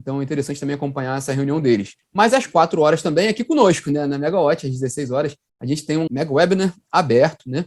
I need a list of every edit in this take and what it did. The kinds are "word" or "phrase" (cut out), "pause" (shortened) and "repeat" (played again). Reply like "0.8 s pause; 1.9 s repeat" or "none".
2.0 s pause; 6.1 s word